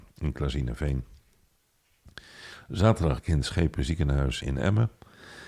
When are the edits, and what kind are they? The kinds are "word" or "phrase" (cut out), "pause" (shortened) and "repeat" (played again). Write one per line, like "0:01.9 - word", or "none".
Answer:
0:03.2 - word
0:04.4 - word